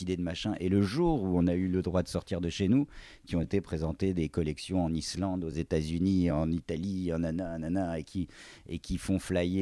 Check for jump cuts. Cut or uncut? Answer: uncut